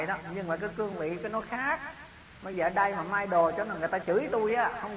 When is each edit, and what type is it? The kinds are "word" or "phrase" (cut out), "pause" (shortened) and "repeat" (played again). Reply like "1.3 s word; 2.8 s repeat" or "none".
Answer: none

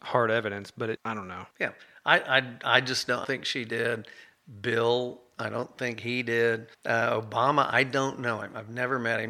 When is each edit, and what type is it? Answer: 1.0 s word; 1.5 s pause; 3.2 s word; 6.7 s pause

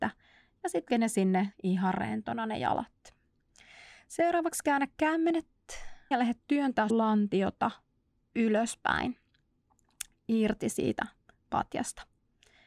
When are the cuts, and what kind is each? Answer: 0.9 s word; 1.5 s word; 6.1 s word; 6.9 s word

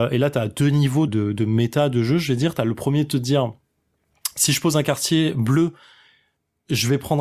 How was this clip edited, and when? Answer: 1.1 s word

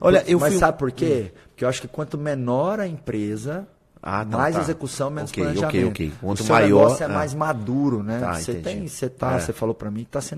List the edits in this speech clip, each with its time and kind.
none

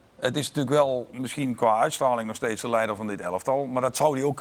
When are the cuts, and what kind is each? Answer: none

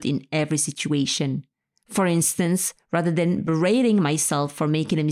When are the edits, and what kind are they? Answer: none

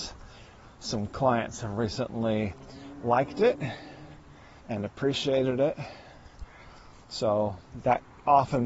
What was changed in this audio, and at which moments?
4.6 s pause

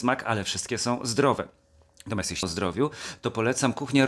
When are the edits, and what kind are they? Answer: 2.4 s word

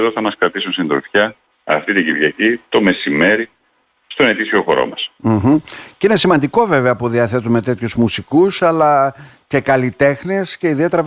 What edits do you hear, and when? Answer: none

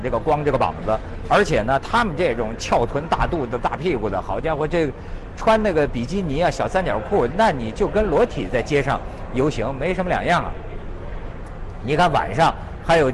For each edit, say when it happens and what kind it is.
none

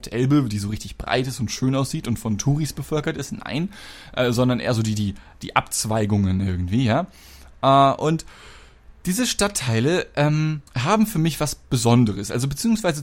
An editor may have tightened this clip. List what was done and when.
10.7 s pause

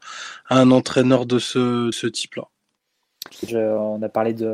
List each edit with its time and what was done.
1.9 s word; 3.5 s word

